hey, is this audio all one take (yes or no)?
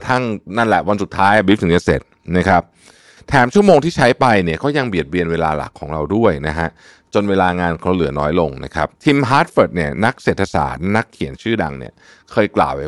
no